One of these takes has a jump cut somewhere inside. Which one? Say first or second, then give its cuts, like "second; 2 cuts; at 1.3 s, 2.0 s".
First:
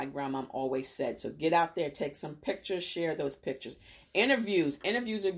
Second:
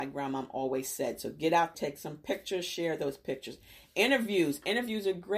second; 1 cut; at 1.7 s